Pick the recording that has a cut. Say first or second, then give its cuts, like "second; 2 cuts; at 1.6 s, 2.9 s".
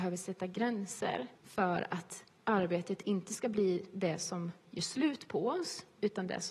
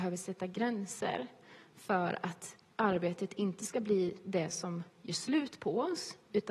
first; 1 cut; at 1.4 s